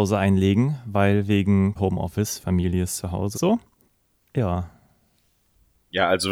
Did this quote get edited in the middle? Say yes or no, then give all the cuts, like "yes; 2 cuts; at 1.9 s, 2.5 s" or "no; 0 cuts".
yes; 3 cuts; at 1.8 s, 3.3 s, 3.9 s